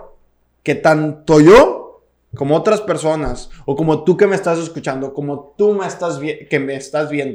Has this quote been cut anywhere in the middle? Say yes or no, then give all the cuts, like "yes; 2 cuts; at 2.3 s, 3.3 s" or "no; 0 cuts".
no; 0 cuts